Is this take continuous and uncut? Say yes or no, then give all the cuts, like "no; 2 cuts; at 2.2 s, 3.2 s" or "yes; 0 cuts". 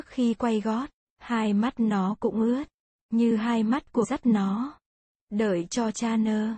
no; 1 cut; at 4.0 s